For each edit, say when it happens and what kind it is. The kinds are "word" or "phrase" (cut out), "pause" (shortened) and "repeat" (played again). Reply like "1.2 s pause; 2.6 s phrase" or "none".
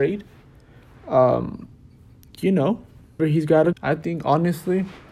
3.2 s word; 3.7 s word